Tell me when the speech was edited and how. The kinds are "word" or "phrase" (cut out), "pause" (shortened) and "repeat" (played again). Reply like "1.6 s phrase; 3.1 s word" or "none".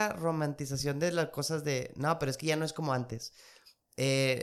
none